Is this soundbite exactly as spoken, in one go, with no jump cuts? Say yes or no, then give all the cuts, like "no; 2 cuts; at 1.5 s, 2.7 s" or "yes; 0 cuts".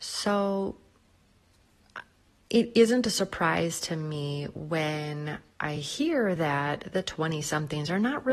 yes; 0 cuts